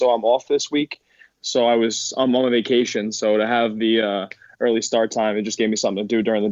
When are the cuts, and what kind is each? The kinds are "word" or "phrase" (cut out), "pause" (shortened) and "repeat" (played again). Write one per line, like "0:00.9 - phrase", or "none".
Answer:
none